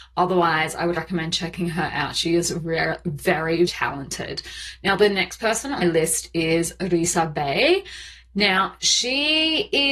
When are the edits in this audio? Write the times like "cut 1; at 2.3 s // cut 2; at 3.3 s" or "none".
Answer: cut 1; at 1.0 s // cut 2; at 3.7 s // cut 3; at 5.8 s

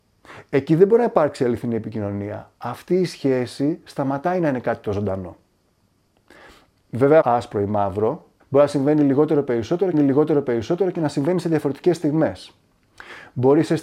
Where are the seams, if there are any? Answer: cut 1; at 7.2 s // cut 2; at 8.4 s // cut 3; at 9.9 s

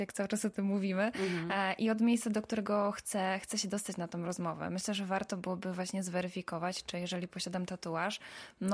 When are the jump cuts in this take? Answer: none

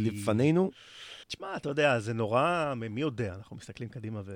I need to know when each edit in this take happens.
cut 1; at 1.2 s

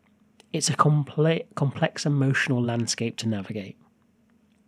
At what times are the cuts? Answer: none

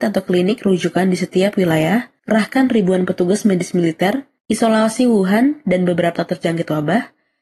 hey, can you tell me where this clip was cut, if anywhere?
cut 1; at 2.2 s // cut 2; at 4.4 s // cut 3; at 6.2 s

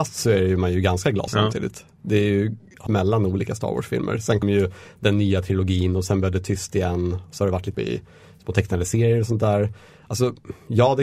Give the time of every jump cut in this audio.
cut 1; at 1.3 s // cut 2; at 2.9 s // cut 3; at 4.4 s // cut 4; at 7.7 s

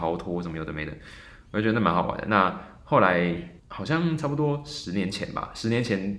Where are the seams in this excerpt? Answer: cut 1; at 3.6 s

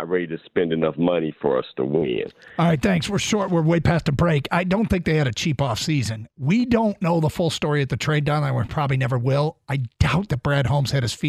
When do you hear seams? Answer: none

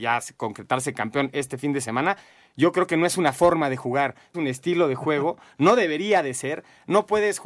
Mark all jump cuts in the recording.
cut 1; at 4.3 s

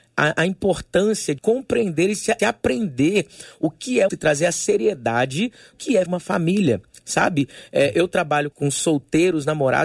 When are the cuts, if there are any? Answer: cut 1; at 1.4 s // cut 2; at 2.4 s // cut 3; at 4.1 s // cut 4; at 5.7 s // cut 5; at 6.1 s // cut 6; at 8.5 s

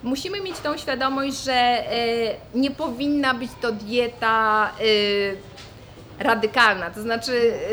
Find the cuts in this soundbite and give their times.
none

